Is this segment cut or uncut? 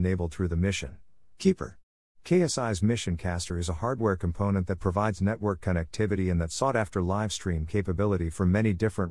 uncut